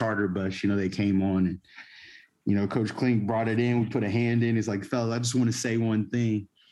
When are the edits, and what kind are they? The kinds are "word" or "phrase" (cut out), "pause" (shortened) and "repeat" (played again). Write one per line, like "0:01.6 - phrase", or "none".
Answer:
none